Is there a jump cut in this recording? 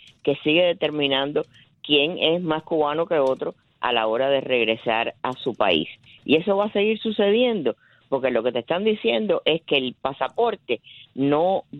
no; 0 cuts

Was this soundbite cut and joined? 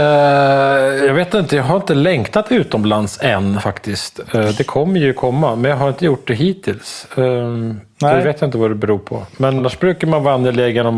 yes; 2 cuts; at 3.6 s, 9.6 s

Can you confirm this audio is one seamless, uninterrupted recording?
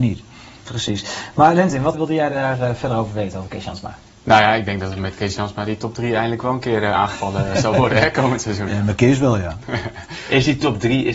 no; 1 cut; at 1.9 s

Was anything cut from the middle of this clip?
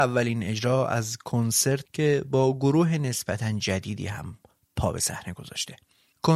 yes; 1 cut; at 1.8 s

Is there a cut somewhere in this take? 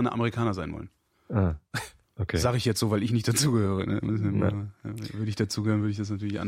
yes; 1 cut; at 2.0 s

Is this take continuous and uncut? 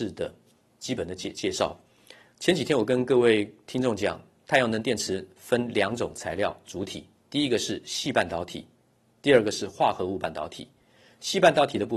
yes; 0 cuts

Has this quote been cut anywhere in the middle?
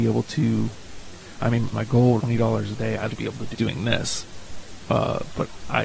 yes; 4 cuts; at 1.7 s, 2.2 s, 3.1 s, 3.5 s

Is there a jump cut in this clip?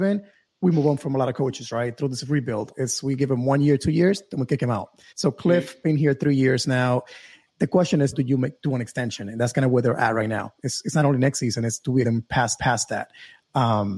yes; 4 cuts; at 5.1 s, 8.1 s, 12.0 s, 12.6 s

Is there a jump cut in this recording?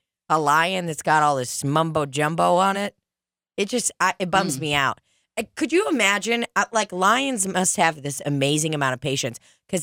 no; 0 cuts

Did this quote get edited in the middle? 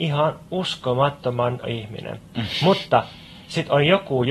yes; 1 cut; at 1.6 s

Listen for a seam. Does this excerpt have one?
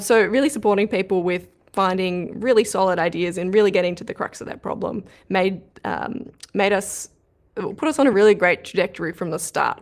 no; 0 cuts

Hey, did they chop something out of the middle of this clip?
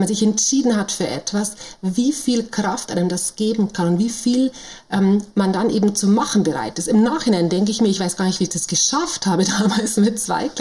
no; 0 cuts

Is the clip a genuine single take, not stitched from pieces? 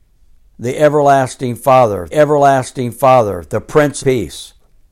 no; 2 cuts; at 2.1 s, 4.0 s

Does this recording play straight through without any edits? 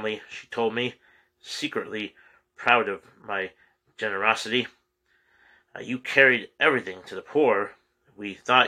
yes; 0 cuts

